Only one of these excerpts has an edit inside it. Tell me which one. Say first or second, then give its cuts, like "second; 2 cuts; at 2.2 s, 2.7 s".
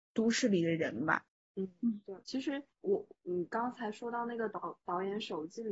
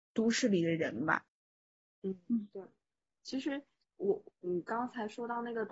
first; 3 cuts; at 1.3 s, 2.2 s, 2.7 s